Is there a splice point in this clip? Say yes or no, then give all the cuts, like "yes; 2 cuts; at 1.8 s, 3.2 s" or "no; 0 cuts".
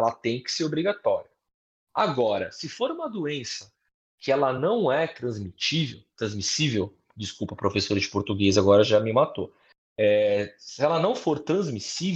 no; 0 cuts